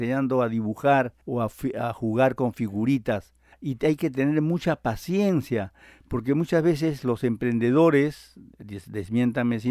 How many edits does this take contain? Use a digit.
2